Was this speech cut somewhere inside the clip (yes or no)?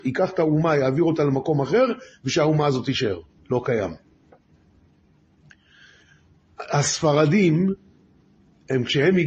yes